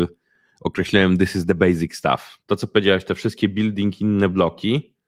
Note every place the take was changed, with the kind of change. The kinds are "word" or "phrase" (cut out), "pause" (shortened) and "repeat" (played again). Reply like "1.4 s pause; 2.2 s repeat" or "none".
2.4 s pause